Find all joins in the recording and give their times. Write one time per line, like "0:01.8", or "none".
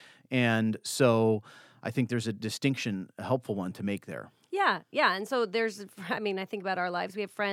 none